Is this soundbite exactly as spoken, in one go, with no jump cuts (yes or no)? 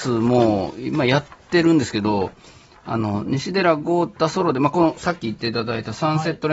yes